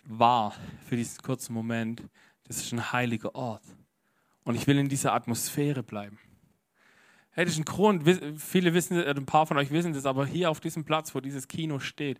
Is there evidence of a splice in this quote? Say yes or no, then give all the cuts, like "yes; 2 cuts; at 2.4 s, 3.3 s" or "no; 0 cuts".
no; 0 cuts